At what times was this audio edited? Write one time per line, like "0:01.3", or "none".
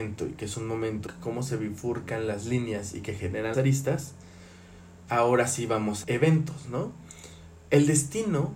0:01.1
0:03.5
0:05.1
0:06.0